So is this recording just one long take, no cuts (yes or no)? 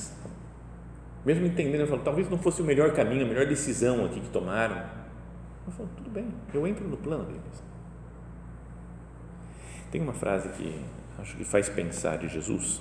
yes